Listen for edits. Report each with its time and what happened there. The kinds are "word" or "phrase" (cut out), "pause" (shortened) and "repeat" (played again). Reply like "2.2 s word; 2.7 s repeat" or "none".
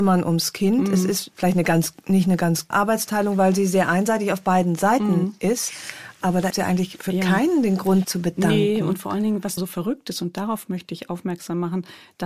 1.3 s word; 2.7 s word; 6.5 s word; 8.0 s word; 9.6 s word